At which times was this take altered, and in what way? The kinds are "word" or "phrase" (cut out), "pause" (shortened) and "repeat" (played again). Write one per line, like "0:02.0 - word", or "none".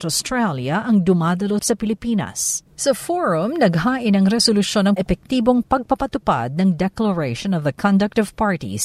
0:01.6 - phrase
0:02.7 - pause
0:05.0 - phrase

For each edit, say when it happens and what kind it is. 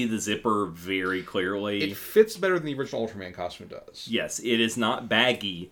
none

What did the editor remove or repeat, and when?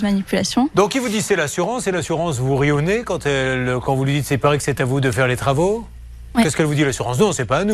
none

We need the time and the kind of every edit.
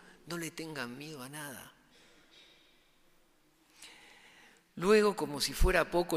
none

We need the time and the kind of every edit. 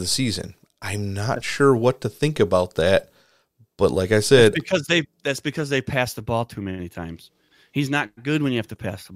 none

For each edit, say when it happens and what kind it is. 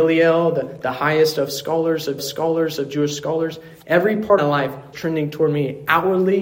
0:02.2 - repeat
0:04.4 - phrase
0:04.9 - word

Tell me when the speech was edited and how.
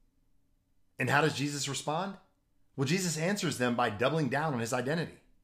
none

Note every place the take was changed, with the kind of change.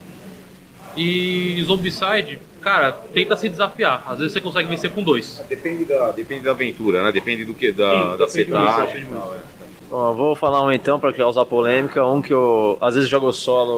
0:02.5 - pause

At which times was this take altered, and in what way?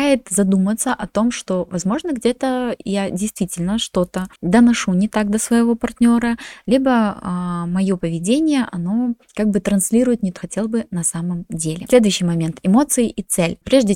0:04.4 - pause
0:09.2 - pause
0:10.4 - phrase

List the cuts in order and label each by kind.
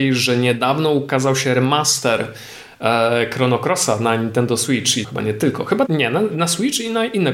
0:05.0 - word
0:05.9 - word

